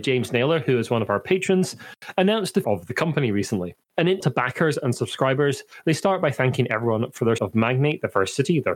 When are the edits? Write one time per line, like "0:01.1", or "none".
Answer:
0:02.6
0:03.8
0:04.2
0:07.4

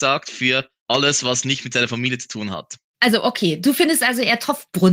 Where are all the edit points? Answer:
none

